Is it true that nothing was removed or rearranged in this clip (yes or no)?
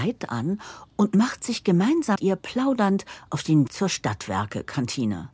no